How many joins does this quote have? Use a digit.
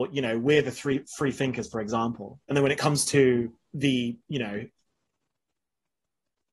2